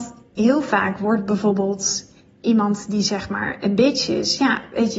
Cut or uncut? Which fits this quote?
uncut